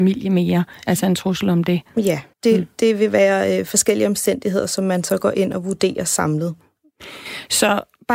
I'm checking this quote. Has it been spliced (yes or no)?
yes